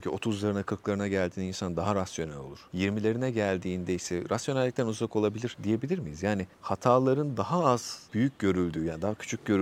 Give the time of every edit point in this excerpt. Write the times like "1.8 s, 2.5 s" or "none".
6.5 s

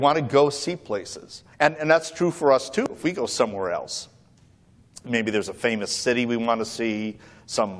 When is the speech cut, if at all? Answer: 1.5 s

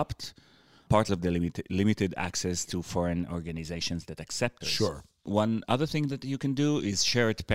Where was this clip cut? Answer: 1.1 s, 4.6 s

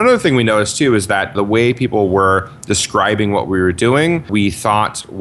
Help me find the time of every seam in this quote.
1.3 s

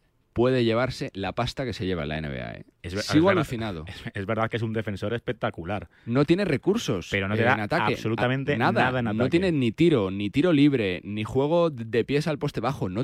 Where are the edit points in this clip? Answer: 2.7 s

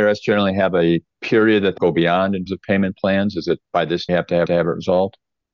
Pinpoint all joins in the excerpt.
1.1 s, 1.8 s, 2.5 s, 3.6 s, 4.1 s, 4.5 s

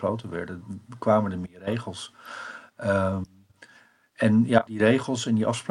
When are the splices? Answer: 4.7 s

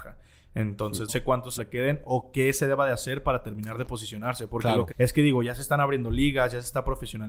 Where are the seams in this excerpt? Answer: 1.1 s, 1.6 s, 4.9 s

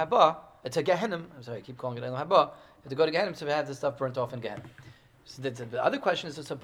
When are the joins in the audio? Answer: none

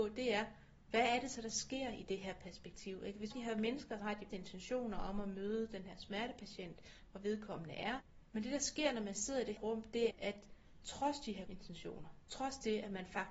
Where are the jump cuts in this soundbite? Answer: 3.3 s, 4.0 s, 4.3 s, 9.6 s, 10.1 s, 11.5 s

